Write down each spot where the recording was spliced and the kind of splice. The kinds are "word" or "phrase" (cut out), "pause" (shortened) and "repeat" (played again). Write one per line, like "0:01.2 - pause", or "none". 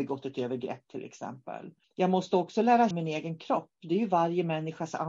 0:01.8 - pause
0:02.9 - word